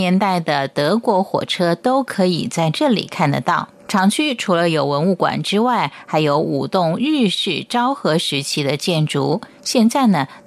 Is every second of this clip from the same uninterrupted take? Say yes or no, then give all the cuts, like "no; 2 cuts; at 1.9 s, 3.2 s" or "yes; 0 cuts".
no; 1 cut; at 3.8 s